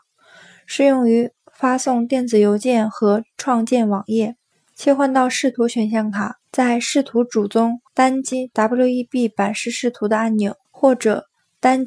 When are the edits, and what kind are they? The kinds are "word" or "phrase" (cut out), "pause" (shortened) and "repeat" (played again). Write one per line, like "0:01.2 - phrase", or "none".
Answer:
0:04.5 - pause
0:06.4 - pause
0:07.9 - pause
0:10.6 - pause